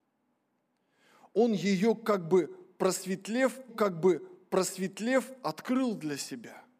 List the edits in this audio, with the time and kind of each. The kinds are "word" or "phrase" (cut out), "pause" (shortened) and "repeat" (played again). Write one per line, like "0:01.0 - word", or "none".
0:03.7 - repeat